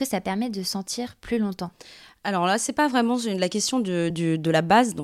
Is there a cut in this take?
no; 0 cuts

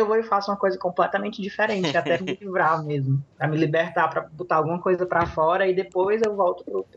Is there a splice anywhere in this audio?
yes; 2 cuts; at 2.2 s, 3.3 s

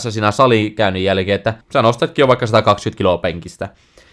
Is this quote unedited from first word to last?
no; 1 cut; at 1.6 s

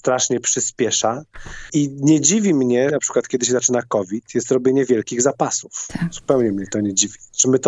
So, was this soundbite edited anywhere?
yes; 1 cut; at 2.9 s

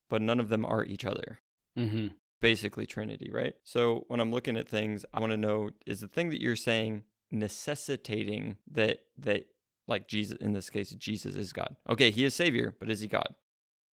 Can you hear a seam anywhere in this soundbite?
yes; 3 cuts; at 3.6 s, 5.2 s, 8.6 s

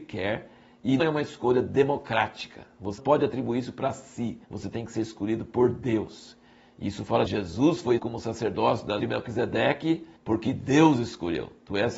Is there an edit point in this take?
yes; 7 cuts; at 1.0 s, 3.0 s, 4.4 s, 7.3 s, 8.0 s, 9.0 s, 10.2 s

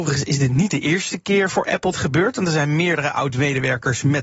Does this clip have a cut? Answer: yes; 1 cut; at 1.9 s

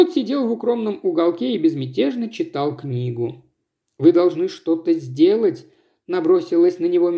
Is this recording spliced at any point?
no; 0 cuts

